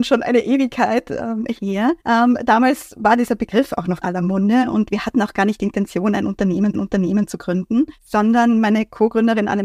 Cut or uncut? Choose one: cut